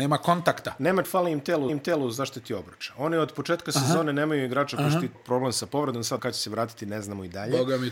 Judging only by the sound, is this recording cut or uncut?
cut